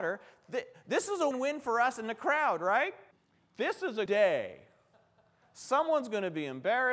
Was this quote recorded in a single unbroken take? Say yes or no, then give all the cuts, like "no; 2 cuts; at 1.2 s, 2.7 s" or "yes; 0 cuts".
no; 3 cuts; at 1.3 s, 3.1 s, 4.1 s